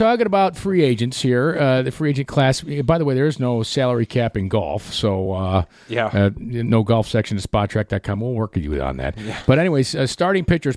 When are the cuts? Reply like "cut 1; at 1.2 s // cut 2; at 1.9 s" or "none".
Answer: none